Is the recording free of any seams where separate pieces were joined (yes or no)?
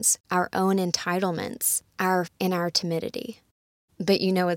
no